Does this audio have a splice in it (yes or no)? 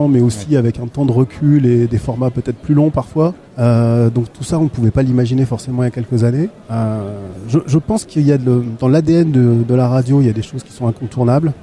yes